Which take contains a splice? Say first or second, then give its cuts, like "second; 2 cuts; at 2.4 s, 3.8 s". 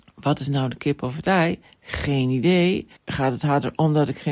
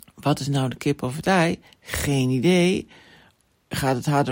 first; 1 cut; at 3.0 s